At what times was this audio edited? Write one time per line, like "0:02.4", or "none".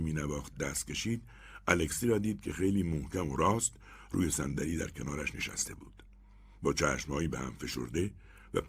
none